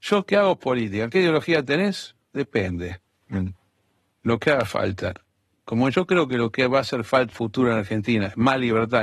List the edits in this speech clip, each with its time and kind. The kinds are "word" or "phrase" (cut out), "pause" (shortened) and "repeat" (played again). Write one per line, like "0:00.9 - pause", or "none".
0:07.3 - phrase